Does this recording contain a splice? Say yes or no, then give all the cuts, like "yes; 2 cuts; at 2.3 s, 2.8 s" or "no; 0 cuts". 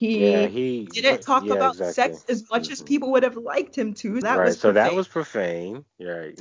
yes; 2 cuts; at 1.2 s, 4.2 s